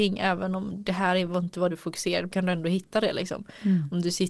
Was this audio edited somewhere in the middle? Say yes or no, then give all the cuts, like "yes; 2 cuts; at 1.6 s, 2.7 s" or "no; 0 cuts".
yes; 2 cuts; at 1.7 s, 2.3 s